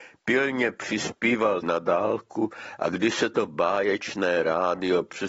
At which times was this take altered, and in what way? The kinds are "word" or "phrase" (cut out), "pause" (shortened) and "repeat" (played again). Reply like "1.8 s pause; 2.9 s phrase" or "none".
1.6 s word